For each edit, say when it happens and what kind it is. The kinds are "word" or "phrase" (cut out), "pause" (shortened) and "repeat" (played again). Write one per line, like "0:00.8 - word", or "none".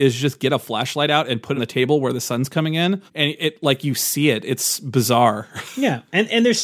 0:01.6 - word
0:03.1 - pause